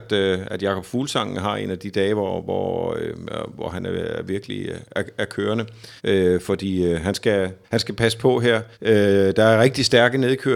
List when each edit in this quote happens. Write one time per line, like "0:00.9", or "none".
0:06.0
0:07.6
0:08.7